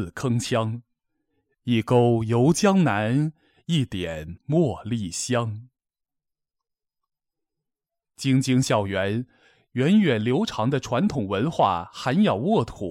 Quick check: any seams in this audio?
no; 0 cuts

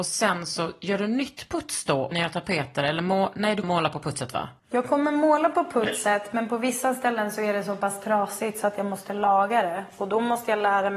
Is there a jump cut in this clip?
yes; 3 cuts; at 2.1 s, 3.6 s, 4.6 s

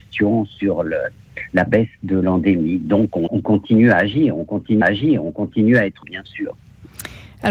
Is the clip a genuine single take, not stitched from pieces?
no; 3 cuts; at 3.3 s, 4.8 s, 6.0 s

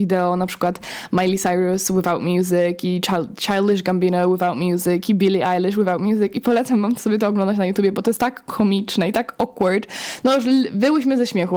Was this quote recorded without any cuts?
yes; 0 cuts

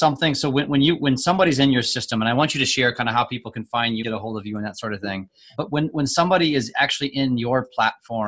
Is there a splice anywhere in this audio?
yes; 1 cut; at 4.0 s

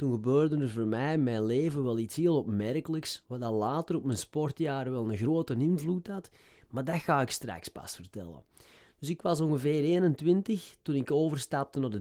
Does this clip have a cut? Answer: no; 0 cuts

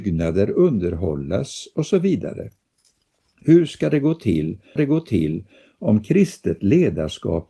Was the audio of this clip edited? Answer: yes; 1 cut; at 4.8 s

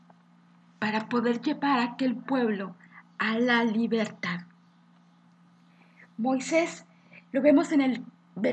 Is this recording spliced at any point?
no; 0 cuts

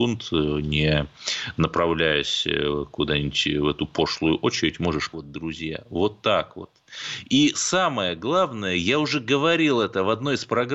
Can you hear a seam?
yes; 1 cut; at 5.1 s

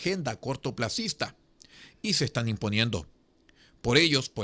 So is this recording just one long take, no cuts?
yes; 0 cuts

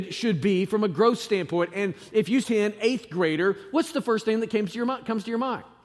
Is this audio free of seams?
no; 1 cut; at 2.4 s

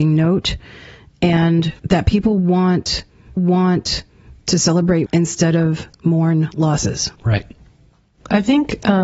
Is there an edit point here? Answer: yes; 5 cuts; at 1.8 s, 3.4 s, 5.1 s, 5.9 s, 7.1 s

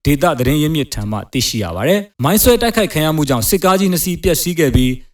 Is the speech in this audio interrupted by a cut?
yes; 1 cut; at 2.1 s

